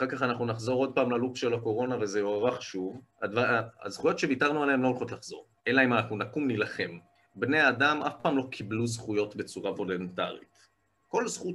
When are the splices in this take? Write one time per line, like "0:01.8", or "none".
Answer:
0:03.1
0:05.6
0:07.2